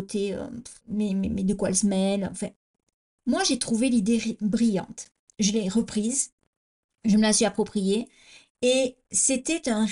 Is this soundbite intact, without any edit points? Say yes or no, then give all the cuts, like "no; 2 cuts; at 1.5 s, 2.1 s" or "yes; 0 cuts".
yes; 0 cuts